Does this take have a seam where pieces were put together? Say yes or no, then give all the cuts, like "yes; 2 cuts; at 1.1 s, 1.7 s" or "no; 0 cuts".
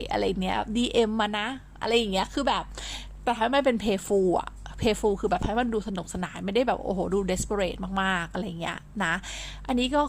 no; 0 cuts